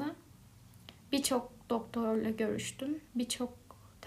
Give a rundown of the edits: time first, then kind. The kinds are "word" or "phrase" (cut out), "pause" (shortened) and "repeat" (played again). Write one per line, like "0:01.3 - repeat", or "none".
0:01.0 - pause
0:03.1 - pause